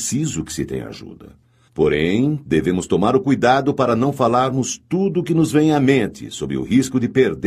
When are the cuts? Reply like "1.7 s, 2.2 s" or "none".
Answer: none